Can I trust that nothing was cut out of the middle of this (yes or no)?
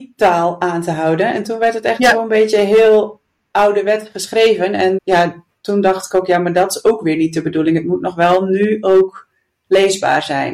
no